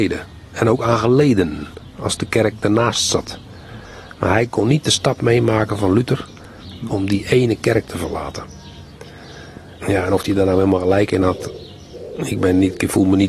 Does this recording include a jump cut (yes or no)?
yes